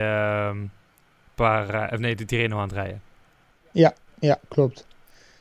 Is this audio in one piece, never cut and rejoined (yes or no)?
yes